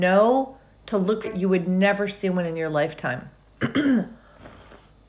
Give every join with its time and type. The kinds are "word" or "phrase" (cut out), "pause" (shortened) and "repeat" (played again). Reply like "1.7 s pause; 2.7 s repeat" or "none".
1.2 s word